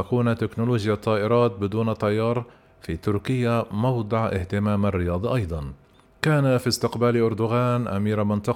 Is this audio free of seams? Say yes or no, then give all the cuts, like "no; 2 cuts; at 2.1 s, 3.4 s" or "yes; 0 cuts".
yes; 0 cuts